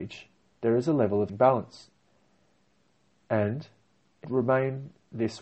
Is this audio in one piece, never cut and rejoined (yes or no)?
no